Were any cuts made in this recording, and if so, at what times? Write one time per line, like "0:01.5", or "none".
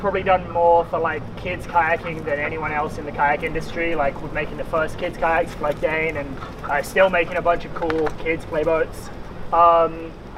none